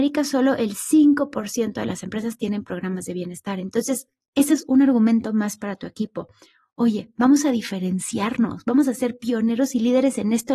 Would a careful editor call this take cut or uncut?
uncut